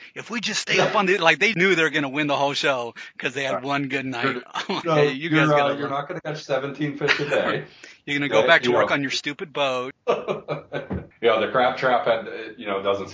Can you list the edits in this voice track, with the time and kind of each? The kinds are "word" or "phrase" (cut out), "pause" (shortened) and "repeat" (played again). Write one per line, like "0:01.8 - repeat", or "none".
0:01.5 - word
0:04.8 - word
0:11.1 - pause